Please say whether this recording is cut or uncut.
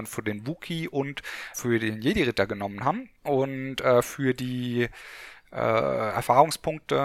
cut